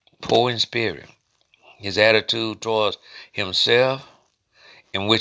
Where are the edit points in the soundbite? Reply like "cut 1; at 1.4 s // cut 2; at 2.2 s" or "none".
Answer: none